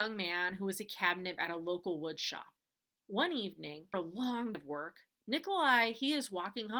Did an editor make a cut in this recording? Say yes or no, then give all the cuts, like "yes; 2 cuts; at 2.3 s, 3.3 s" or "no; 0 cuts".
yes; 3 cuts; at 1.4 s, 3.9 s, 4.5 s